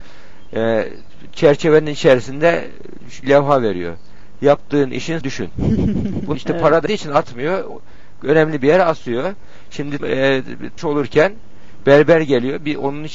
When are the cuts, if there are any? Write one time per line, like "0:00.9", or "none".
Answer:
0:03.2
0:05.2
0:06.3
0:06.9
0:10.0
0:10.8